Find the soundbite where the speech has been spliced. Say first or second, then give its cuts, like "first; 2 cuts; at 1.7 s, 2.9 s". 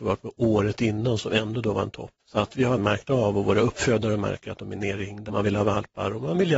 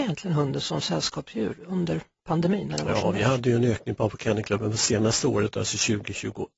first; 3 cuts; at 2.2 s, 2.8 s, 5.3 s